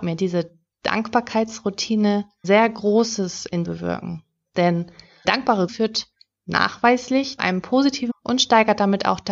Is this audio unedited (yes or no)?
no